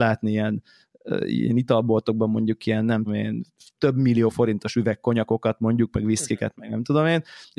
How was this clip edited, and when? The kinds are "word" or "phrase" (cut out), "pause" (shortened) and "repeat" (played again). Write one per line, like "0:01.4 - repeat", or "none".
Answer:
0:03.1 - word
0:03.8 - word